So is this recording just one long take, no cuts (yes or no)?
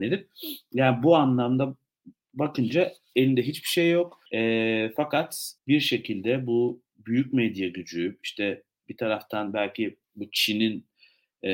no